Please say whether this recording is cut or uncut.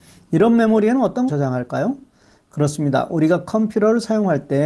cut